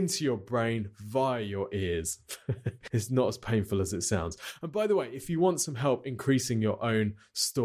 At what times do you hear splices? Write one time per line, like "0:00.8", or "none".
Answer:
0:02.9